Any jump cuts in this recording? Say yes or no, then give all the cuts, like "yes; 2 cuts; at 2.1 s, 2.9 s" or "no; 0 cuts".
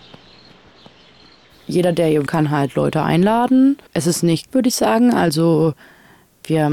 yes; 3 cuts; at 2.3 s, 3.9 s, 4.5 s